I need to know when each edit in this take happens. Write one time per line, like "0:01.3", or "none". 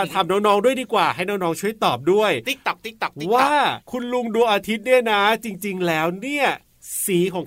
0:03.8